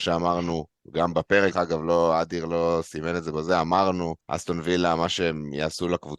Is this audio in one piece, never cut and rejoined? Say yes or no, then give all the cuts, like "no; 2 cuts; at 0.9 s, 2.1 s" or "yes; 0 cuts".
no; 2 cuts; at 1.5 s, 4.2 s